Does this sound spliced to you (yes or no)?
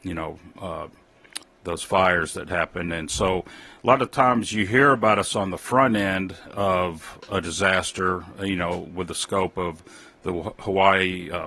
no